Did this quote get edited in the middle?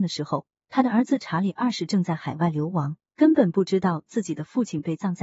yes; 1 cut; at 3.1 s

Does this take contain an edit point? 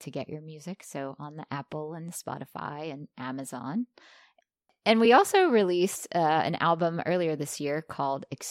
no; 0 cuts

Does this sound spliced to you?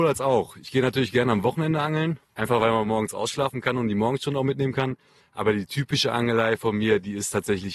yes; 1 cut; at 2.2 s

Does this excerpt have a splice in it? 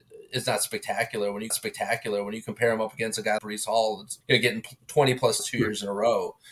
yes; 4 cuts; at 1.5 s, 3.4 s, 4.2 s, 5.4 s

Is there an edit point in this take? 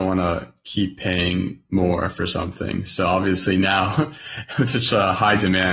no; 0 cuts

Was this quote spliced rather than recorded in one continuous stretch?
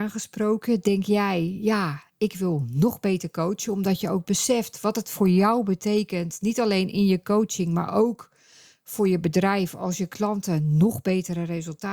no; 0 cuts

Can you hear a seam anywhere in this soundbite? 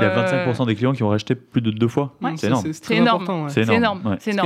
no; 0 cuts

